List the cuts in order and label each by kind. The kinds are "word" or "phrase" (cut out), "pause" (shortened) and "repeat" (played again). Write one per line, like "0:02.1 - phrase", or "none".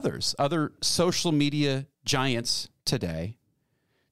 0:01.9 - pause